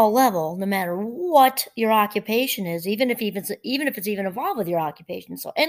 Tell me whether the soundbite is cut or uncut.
uncut